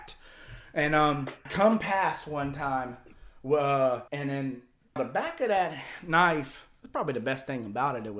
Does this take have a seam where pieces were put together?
yes; 3 cuts; at 1.5 s, 4.1 s, 5.0 s

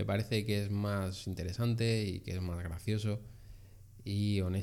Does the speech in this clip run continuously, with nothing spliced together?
yes; 0 cuts

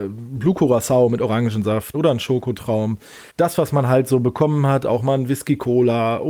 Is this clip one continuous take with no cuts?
no; 2 cuts; at 1.9 s, 3.3 s

